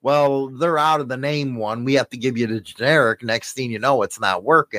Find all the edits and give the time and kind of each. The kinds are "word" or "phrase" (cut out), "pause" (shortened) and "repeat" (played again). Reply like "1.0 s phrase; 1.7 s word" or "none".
none

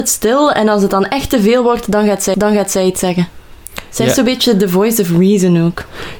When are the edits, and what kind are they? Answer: 2.3 s repeat

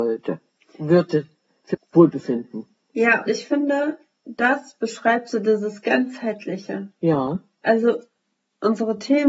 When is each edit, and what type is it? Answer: 1.7 s word; 3.3 s word

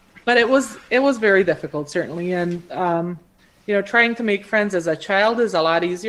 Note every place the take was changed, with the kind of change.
3.4 s pause

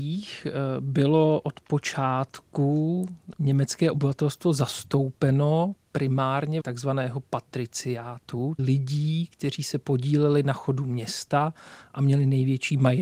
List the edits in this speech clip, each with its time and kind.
6.6 s phrase; 8.6 s word

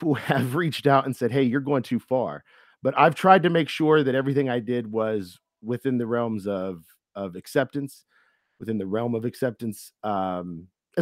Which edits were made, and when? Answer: none

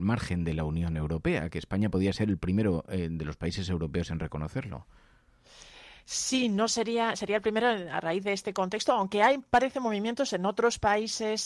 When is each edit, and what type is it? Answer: none

